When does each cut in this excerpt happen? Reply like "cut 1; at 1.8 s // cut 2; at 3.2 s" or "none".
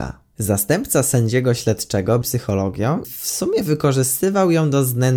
cut 1; at 2.2 s // cut 2; at 3.0 s

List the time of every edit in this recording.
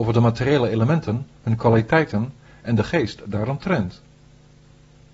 none

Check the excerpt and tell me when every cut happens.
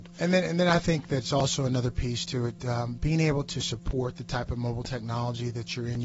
none

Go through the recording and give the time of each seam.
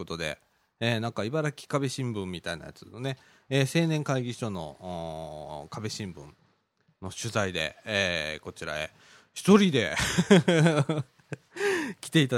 none

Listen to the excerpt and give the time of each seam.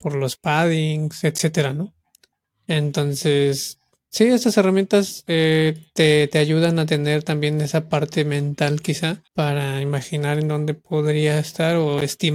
cut 1; at 9.3 s

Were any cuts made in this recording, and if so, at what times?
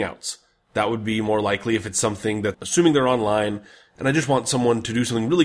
cut 1; at 2.5 s

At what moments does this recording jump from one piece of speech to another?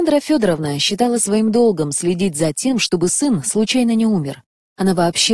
none

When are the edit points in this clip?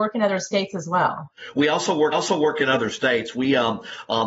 cut 1; at 2.1 s

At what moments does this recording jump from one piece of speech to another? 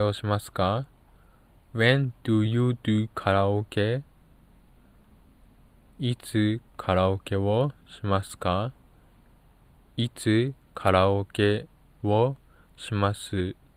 none

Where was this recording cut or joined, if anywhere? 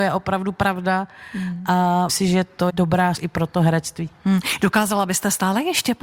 cut 1; at 2.1 s // cut 2; at 2.7 s // cut 3; at 3.2 s

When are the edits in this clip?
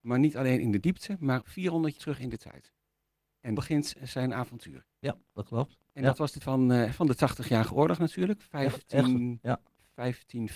cut 1; at 1.4 s // cut 2; at 2.0 s // cut 3; at 3.6 s // cut 4; at 4.9 s // cut 5; at 6.4 s

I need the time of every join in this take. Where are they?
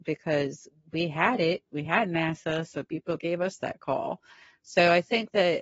none

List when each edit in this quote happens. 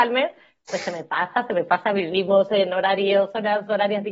none

